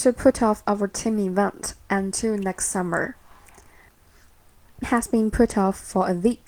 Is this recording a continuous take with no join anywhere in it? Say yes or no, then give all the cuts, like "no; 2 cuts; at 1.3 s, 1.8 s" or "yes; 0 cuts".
no; 1 cut; at 4.8 s